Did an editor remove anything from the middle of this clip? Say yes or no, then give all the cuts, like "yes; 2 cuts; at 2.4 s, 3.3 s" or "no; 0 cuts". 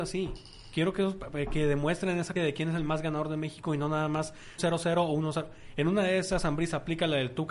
yes; 2 cuts; at 2.4 s, 4.6 s